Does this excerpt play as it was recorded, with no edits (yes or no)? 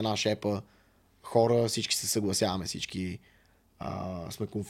yes